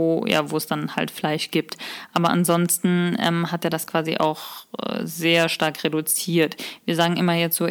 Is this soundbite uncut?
yes; 0 cuts

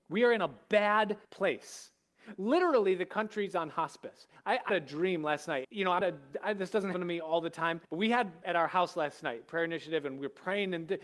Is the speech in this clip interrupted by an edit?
yes; 7 cuts; at 1.2 s, 4.7 s, 5.6 s, 6.0 s, 6.9 s, 7.8 s, 8.4 s

